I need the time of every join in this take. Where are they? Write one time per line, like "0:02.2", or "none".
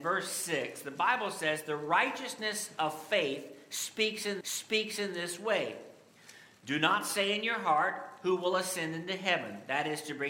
0:04.4